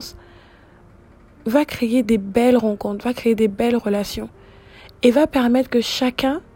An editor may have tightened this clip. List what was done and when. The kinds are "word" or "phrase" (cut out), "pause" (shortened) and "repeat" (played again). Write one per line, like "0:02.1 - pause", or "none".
none